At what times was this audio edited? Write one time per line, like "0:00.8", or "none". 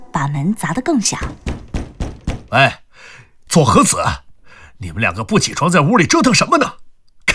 0:03.5